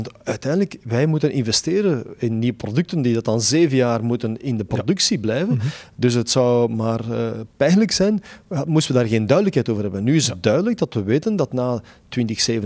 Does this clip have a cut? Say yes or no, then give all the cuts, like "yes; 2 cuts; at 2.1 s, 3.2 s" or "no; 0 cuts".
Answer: no; 0 cuts